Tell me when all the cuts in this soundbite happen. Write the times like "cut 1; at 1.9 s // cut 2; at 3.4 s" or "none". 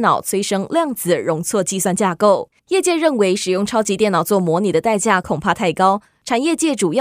cut 1; at 2.6 s